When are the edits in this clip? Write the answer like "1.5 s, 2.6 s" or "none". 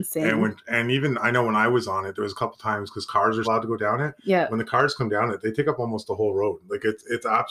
3.4 s